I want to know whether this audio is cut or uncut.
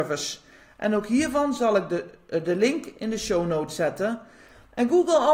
uncut